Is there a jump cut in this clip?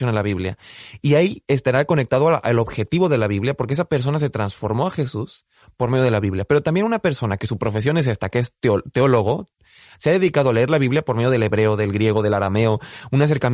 no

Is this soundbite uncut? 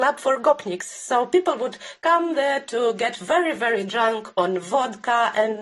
yes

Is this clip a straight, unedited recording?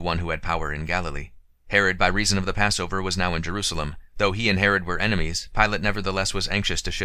no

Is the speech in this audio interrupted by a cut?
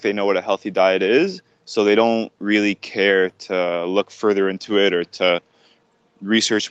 no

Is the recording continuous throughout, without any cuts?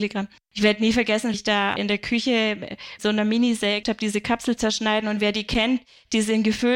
no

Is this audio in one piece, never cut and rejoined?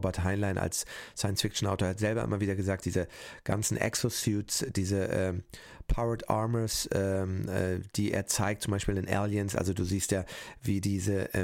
no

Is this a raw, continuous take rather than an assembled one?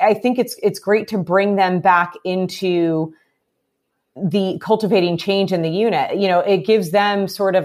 yes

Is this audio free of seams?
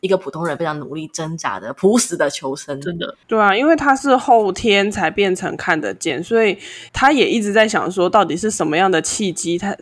no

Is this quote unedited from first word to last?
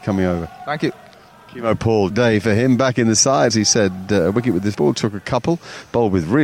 no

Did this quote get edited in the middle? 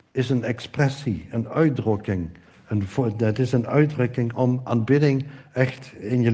no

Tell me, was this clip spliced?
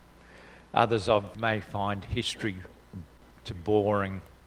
yes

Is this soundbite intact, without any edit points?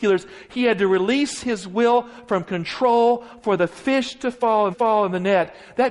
no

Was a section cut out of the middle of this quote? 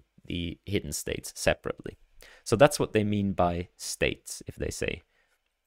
no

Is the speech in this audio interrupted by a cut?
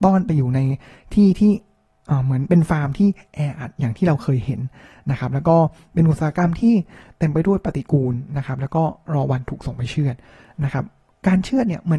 no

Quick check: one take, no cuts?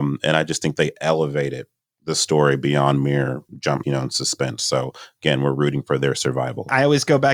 no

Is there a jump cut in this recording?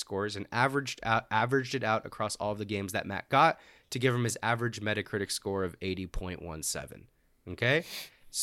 no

